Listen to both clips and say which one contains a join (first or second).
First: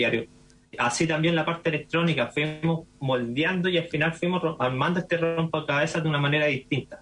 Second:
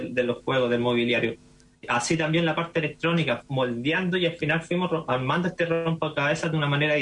second